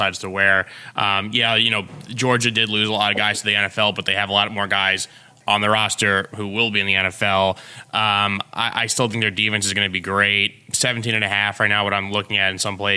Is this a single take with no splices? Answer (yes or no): yes